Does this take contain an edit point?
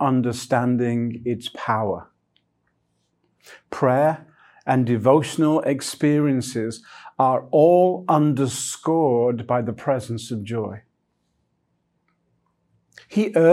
no; 0 cuts

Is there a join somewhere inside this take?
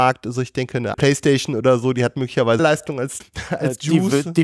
yes; 3 cuts; at 0.9 s, 2.6 s, 3.2 s

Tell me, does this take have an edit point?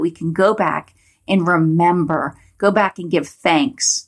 no; 0 cuts

